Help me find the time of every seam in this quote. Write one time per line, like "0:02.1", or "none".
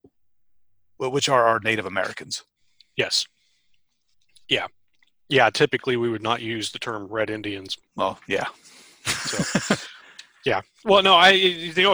0:07.9

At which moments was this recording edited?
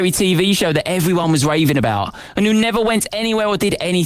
none

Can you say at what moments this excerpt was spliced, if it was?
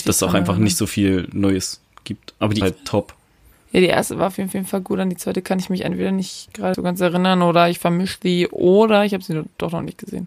0:02.6
0:03.5
0:04.5
0:06.7

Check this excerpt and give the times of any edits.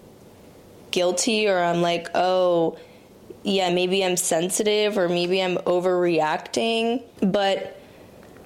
none

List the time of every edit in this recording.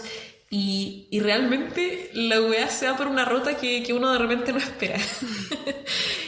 none

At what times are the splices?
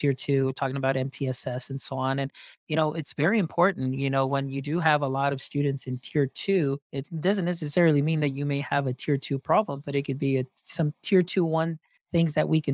0:06.8

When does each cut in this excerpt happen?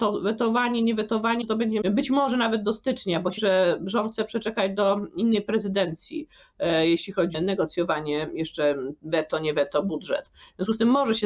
0:01.4
0:01.8
0:03.4
0:07.3

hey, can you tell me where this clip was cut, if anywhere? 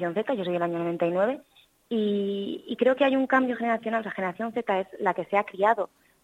none

